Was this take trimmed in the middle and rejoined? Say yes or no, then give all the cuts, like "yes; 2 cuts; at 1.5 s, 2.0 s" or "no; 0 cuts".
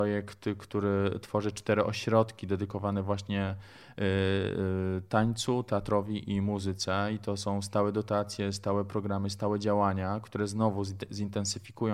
no; 0 cuts